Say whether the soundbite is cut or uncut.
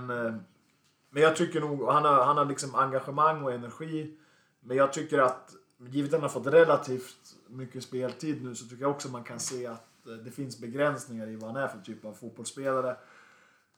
uncut